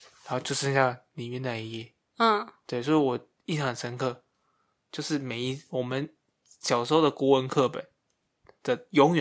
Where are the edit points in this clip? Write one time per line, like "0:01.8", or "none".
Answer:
none